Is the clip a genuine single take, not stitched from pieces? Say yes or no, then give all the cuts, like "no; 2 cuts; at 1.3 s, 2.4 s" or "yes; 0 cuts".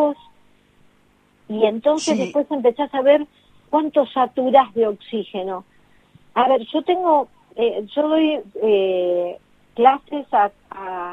yes; 0 cuts